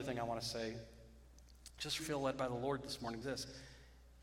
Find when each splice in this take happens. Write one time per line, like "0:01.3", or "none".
0:02.0
0:03.2